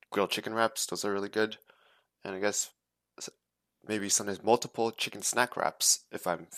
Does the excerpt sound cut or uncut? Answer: uncut